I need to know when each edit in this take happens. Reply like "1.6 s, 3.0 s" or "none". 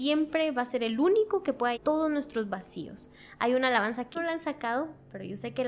1.7 s, 4.1 s